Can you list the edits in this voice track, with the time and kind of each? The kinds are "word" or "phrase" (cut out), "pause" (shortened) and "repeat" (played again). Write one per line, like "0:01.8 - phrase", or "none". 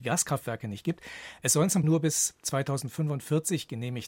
0:01.8 - word